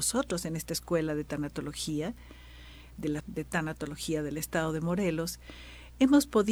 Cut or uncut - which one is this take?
cut